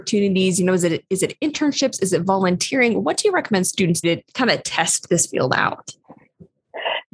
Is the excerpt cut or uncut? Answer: cut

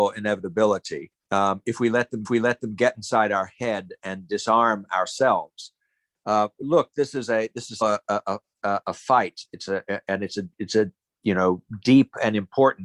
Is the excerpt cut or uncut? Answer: cut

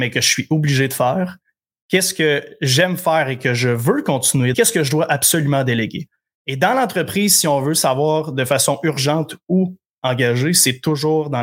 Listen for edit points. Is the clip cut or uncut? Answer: cut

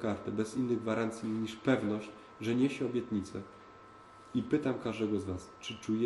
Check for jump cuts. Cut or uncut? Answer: uncut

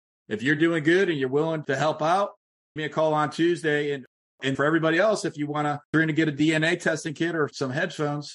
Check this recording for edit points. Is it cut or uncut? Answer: cut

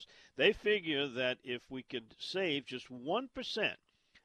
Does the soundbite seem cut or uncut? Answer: uncut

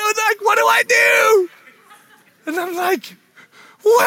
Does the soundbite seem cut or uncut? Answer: uncut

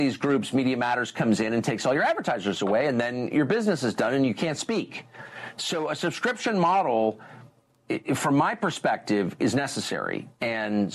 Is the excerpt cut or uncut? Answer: uncut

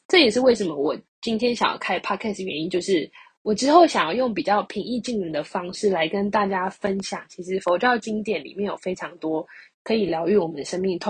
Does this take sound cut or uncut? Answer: uncut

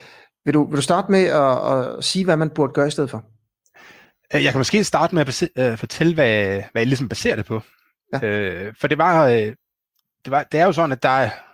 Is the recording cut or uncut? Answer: uncut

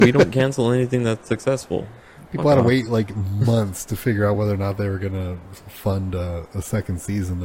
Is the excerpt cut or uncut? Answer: uncut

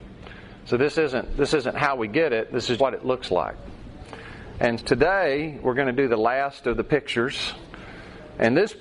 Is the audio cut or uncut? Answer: cut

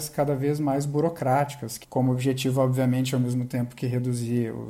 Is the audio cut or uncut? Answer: cut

